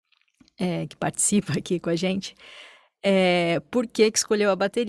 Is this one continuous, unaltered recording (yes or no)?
yes